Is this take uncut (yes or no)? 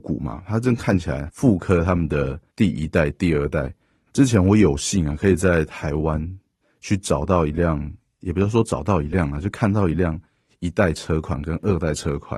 yes